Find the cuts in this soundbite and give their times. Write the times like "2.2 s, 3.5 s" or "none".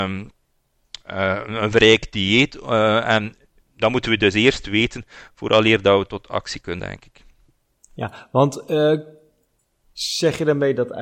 6.8 s

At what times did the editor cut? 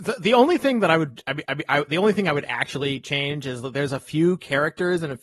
1.4 s

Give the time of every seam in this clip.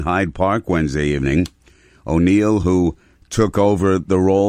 none

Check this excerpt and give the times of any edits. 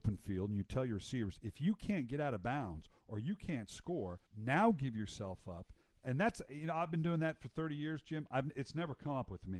4.3 s

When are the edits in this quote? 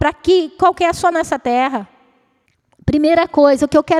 1.1 s, 2.5 s

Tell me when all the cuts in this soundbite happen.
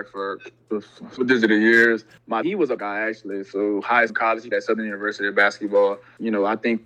1.2 s, 2.4 s, 2.8 s, 4.1 s, 4.5 s

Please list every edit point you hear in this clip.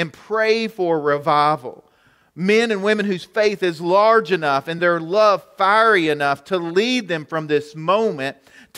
none

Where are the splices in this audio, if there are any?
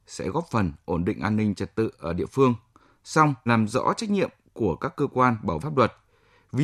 3.5 s, 5.6 s

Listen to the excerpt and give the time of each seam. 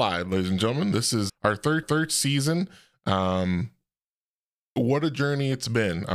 1.3 s, 1.8 s

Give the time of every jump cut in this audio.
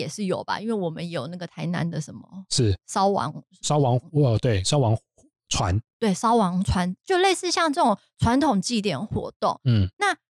none

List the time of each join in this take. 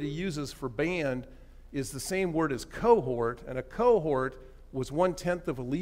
none

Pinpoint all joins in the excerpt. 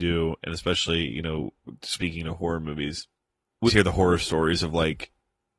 3.7 s

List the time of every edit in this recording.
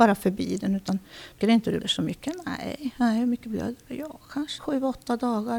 1.4 s, 1.8 s, 4.6 s

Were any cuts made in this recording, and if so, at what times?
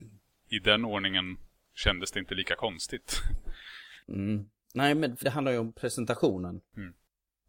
4.0 s, 5.2 s

